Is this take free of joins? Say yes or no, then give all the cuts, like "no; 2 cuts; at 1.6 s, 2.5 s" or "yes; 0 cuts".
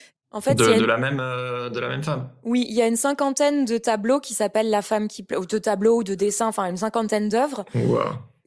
yes; 0 cuts